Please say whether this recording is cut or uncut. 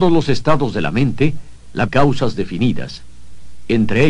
cut